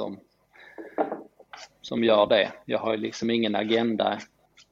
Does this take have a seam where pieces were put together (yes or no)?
no